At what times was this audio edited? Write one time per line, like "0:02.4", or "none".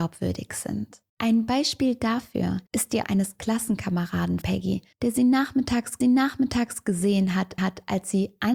0:01.1
0:02.7
0:03.0
0:04.4
0:04.9
0:06.0
0:07.6